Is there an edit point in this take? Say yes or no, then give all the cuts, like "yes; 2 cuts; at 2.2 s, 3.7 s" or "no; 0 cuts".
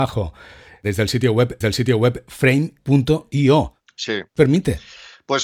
yes; 2 cuts; at 1.6 s, 4.4 s